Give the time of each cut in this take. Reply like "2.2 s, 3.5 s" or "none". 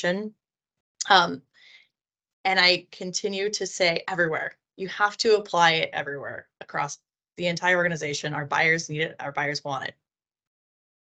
none